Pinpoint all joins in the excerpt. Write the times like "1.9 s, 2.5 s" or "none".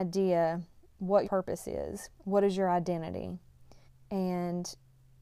1.2 s, 2.1 s, 3.9 s